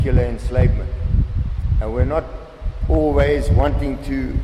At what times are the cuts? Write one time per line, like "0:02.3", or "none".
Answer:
none